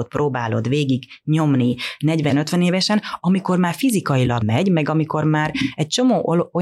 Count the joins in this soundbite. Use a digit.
2